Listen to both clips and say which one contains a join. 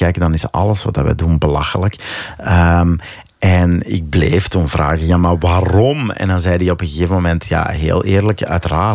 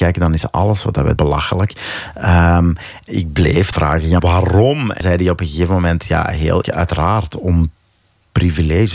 second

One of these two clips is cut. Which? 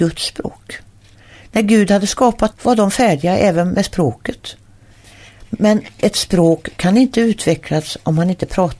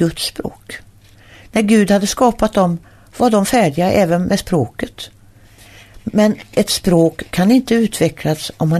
first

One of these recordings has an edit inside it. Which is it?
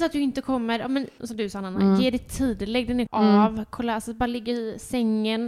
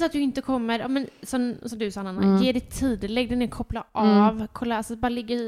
first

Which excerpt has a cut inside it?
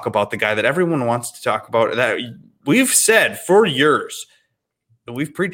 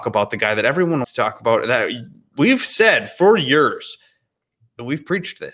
second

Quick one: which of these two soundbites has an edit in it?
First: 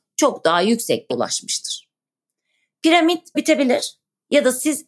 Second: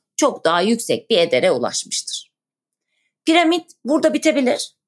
first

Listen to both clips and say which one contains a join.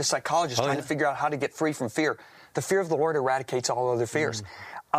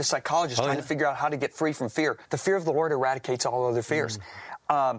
second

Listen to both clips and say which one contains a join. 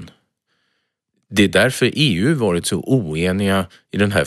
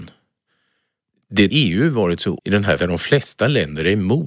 second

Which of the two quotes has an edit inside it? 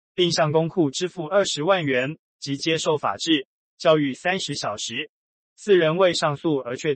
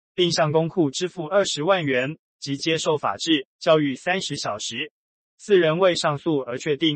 second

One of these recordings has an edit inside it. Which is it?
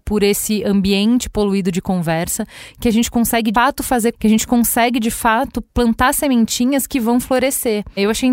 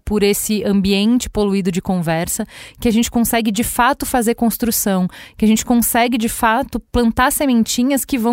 first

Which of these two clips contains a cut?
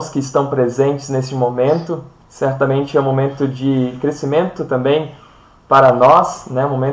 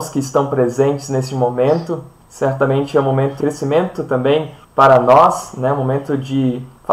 second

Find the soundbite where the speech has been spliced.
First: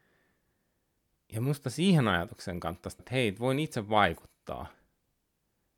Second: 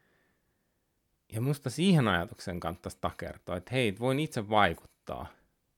first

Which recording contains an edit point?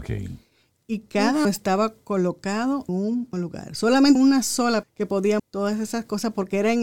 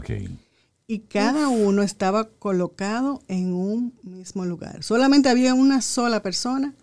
first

